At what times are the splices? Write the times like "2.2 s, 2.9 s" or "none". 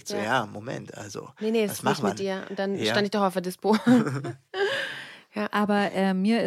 none